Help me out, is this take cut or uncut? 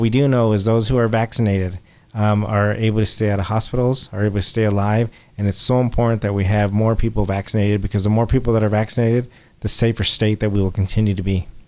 uncut